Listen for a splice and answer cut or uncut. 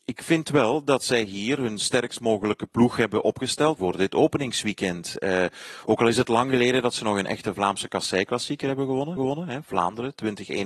cut